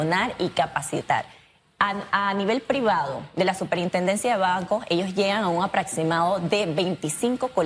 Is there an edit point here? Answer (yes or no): no